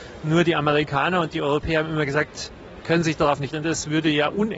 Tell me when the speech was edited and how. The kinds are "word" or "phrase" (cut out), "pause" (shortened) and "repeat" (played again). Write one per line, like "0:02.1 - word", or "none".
0:02.8 - word
0:03.5 - word